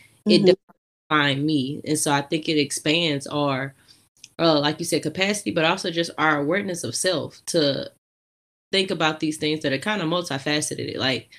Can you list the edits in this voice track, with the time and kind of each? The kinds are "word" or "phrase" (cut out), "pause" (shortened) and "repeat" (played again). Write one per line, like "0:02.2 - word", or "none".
none